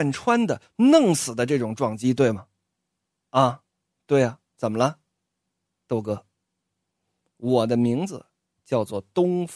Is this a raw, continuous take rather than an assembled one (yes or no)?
yes